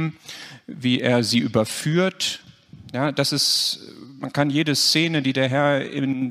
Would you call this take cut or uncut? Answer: uncut